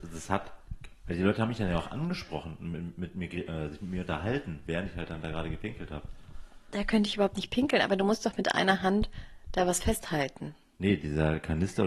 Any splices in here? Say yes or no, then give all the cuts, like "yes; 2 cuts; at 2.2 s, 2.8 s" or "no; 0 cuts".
no; 0 cuts